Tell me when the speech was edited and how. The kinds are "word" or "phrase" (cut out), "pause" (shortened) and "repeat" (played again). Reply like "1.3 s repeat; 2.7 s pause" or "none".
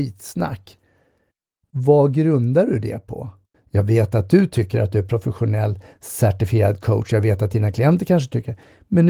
3.5 s pause